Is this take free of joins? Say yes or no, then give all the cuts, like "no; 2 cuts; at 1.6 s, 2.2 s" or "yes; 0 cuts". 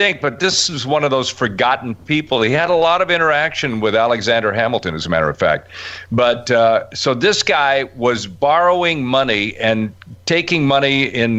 yes; 0 cuts